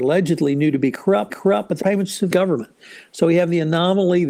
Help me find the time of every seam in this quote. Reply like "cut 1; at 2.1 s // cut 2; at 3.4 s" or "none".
cut 1; at 1.3 s // cut 2; at 1.8 s // cut 3; at 2.3 s